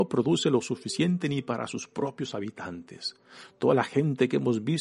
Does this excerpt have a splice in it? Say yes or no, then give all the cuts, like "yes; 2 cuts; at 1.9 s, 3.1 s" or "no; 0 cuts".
no; 0 cuts